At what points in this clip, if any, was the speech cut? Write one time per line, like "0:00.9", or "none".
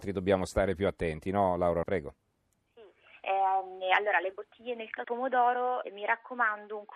0:01.8
0:05.0
0:05.8